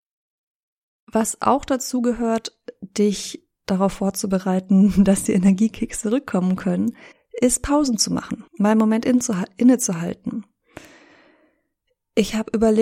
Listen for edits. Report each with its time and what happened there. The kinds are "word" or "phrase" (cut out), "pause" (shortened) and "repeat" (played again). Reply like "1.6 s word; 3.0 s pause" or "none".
3.6 s pause; 7.1 s pause; 8.5 s pause